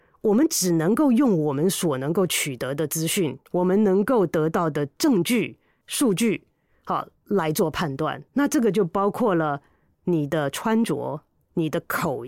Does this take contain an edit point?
yes; 3 cuts; at 3.5 s, 5.8 s, 8.3 s

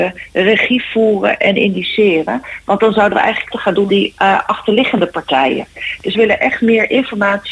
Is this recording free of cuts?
no; 3 cuts; at 3.5 s, 3.9 s, 6.1 s

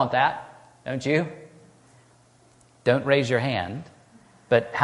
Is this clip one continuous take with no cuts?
yes; 0 cuts

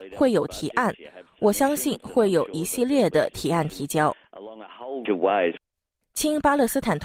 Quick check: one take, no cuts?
no; 2 cuts; at 5.0 s, 5.7 s

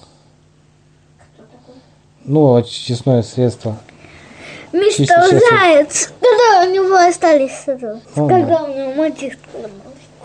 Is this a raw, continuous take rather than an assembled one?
no; 1 cut; at 8.0 s

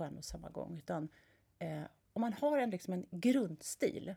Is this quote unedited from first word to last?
yes; 0 cuts

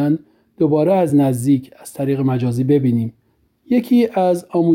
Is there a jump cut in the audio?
no; 0 cuts

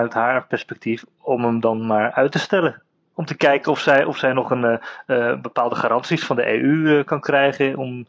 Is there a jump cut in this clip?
no; 0 cuts

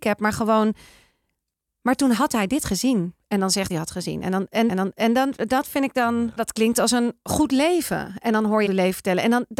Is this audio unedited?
no; 4 cuts; at 3.7 s, 4.7 s, 6.4 s, 8.7 s

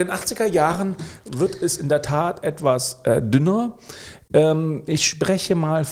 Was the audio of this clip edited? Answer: no; 0 cuts

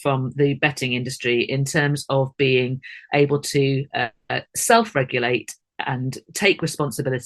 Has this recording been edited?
no; 0 cuts

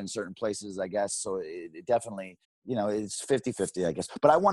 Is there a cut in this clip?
yes; 1 cut; at 2.4 s

